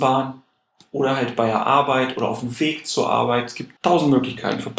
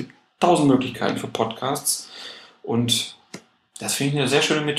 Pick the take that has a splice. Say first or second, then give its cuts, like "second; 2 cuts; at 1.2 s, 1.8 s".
first; 1 cut; at 3.8 s